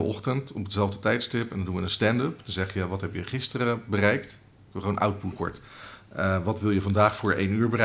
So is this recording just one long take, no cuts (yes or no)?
no